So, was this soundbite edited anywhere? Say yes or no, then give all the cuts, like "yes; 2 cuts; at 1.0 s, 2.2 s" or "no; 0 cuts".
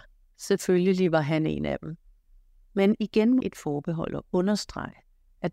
yes; 2 cuts; at 2.2 s, 3.4 s